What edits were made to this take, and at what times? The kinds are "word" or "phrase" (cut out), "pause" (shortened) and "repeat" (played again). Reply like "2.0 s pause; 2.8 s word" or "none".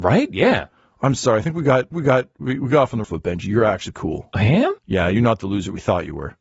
1.9 s repeat; 3.0 s word; 3.9 s word; 4.8 s pause